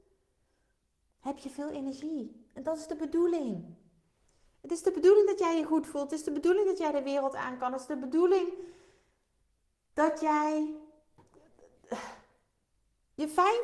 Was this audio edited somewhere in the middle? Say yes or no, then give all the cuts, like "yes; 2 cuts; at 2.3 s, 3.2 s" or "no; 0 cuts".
no; 0 cuts